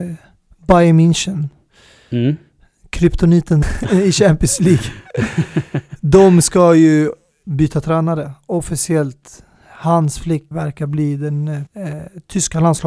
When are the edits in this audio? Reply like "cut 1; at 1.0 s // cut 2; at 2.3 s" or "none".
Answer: cut 1; at 3.6 s // cut 2; at 10.5 s // cut 3; at 11.7 s

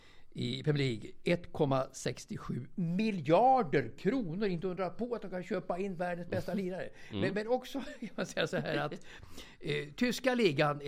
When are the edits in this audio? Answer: none

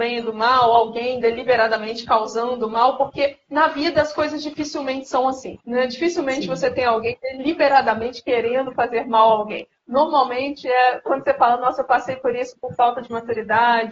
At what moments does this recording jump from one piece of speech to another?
cut 1; at 5.6 s

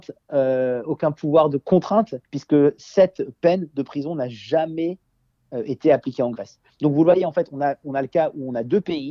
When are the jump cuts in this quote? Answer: cut 1; at 2.2 s

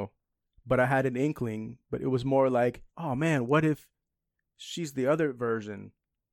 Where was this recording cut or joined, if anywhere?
cut 1; at 2.9 s

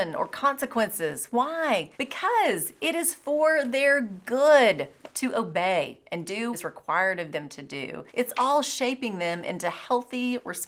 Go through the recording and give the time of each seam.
cut 1; at 1.9 s // cut 2; at 6.5 s // cut 3; at 8.1 s

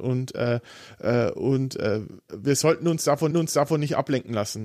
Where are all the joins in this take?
cut 1; at 2.3 s // cut 2; at 3.3 s

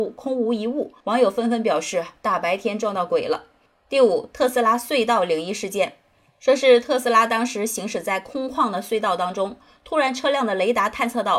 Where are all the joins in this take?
cut 1; at 1.0 s

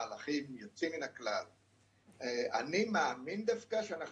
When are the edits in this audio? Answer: none

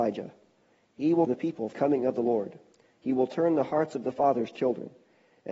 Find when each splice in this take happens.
cut 1; at 1.3 s // cut 2; at 1.7 s // cut 3; at 4.6 s

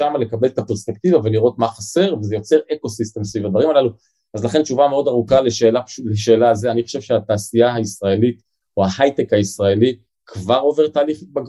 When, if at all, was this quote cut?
none

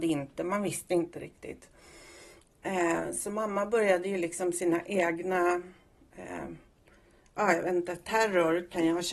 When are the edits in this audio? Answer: none

